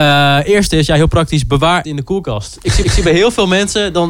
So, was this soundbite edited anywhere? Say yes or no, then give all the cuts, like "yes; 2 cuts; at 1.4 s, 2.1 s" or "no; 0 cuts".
yes; 2 cuts; at 1.8 s, 2.8 s